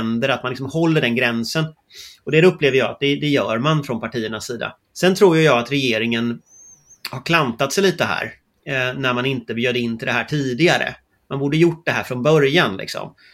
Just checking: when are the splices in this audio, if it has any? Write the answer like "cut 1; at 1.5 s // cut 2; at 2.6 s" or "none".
cut 1; at 4.8 s